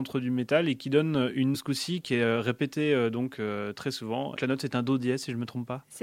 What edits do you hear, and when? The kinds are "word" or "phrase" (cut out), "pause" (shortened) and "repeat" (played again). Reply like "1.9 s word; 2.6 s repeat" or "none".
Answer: 1.5 s phrase; 4.4 s word